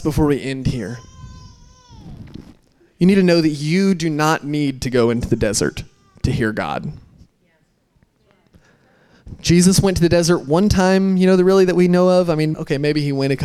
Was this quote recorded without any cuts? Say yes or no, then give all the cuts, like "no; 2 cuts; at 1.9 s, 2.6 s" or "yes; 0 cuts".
no; 1 cut; at 12.5 s